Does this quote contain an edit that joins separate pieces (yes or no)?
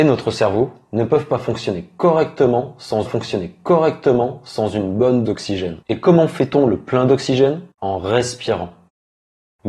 yes